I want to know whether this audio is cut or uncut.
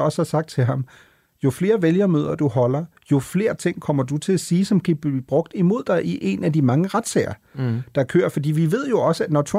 uncut